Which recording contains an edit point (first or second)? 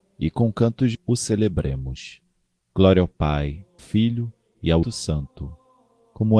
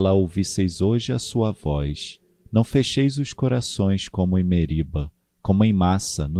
first